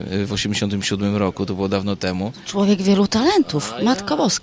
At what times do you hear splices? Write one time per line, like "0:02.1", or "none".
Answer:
none